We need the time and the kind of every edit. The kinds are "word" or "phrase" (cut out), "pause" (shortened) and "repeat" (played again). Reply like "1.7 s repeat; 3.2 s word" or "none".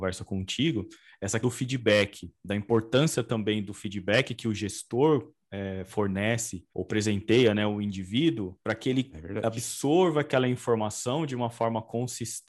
1.4 s word; 2.4 s pause; 6.7 s pause; 8.6 s pause